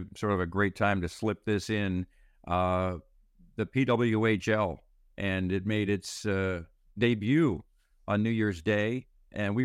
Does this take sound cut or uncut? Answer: uncut